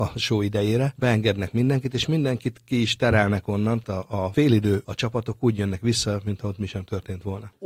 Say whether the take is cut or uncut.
cut